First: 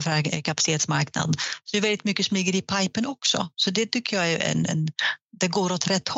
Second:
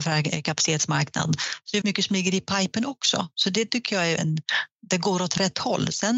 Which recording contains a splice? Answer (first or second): second